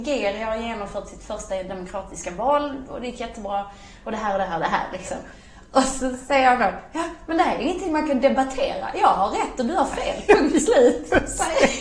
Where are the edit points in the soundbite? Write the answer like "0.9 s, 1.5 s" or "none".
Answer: none